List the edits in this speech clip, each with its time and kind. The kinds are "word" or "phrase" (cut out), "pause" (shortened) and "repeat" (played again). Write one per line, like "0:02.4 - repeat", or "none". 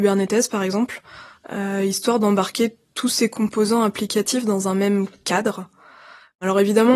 none